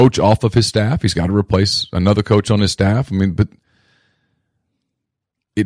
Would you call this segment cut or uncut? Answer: uncut